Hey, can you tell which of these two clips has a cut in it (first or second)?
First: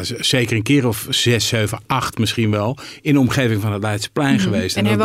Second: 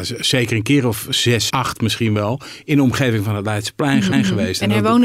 second